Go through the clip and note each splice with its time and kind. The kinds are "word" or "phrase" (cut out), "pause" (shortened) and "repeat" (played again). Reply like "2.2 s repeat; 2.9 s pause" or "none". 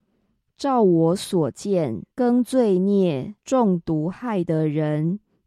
2.1 s pause; 3.4 s pause